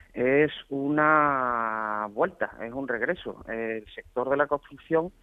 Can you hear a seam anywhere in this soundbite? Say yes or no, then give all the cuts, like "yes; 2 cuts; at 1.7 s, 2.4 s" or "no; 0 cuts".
no; 0 cuts